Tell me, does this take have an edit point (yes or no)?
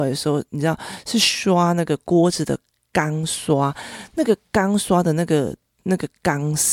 no